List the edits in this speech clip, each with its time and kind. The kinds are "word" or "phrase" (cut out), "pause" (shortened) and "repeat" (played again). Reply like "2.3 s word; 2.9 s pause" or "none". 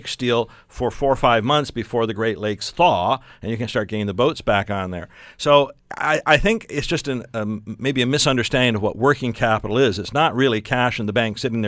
none